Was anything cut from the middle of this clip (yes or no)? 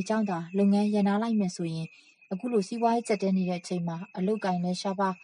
no